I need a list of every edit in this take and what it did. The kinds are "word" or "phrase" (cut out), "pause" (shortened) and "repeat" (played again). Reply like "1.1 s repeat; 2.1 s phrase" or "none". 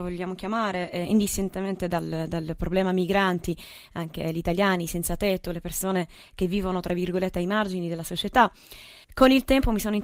9.0 s pause